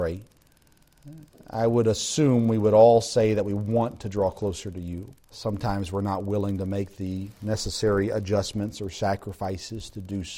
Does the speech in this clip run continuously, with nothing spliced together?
no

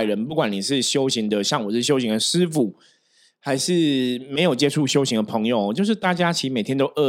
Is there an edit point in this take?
no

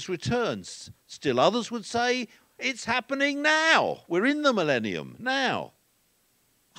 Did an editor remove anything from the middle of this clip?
no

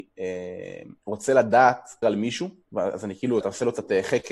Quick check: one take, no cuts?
no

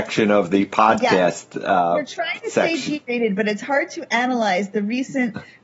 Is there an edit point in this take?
no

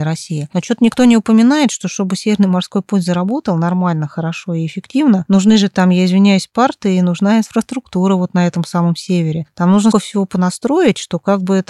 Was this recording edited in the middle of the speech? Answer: yes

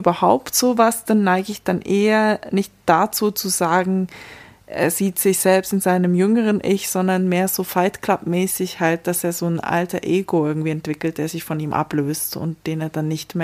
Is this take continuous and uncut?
yes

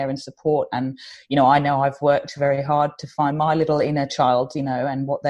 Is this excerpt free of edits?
yes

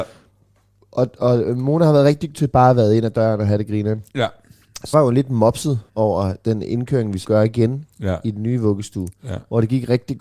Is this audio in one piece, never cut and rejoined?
no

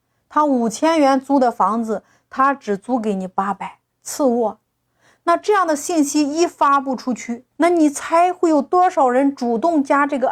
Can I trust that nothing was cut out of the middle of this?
no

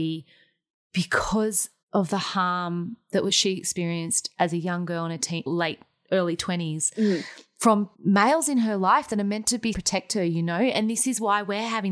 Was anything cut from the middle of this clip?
yes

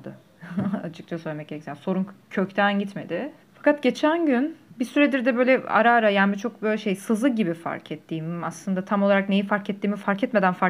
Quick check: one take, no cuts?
no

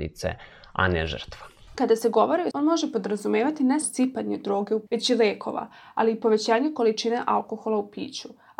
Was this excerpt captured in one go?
no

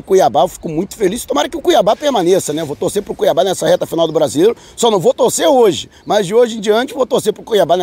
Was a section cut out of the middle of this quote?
no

